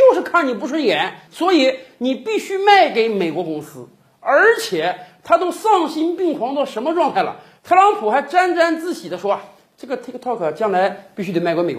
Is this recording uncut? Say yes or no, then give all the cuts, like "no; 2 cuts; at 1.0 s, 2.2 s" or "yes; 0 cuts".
yes; 0 cuts